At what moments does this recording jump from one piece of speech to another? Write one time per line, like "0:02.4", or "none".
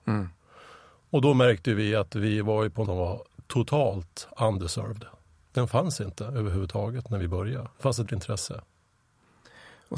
0:02.8
0:05.3
0:07.7
0:08.1